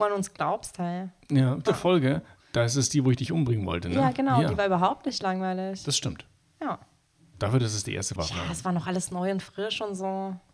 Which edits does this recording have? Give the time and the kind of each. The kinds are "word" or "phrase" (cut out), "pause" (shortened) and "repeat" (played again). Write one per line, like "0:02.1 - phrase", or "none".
0:01.7 - word
0:08.2 - word